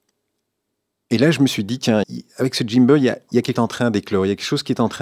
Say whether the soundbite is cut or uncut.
cut